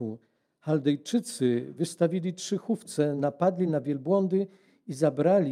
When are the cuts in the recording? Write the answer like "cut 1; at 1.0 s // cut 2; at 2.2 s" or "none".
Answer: none